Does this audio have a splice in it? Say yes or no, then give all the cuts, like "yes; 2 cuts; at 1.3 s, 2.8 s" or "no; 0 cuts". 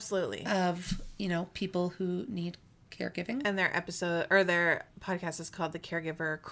no; 0 cuts